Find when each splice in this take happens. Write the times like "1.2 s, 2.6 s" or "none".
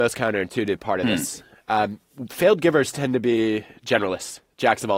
none